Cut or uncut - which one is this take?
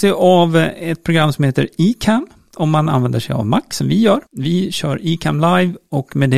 cut